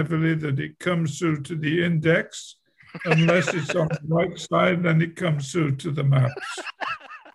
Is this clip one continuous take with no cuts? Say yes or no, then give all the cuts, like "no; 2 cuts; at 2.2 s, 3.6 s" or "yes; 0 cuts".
yes; 0 cuts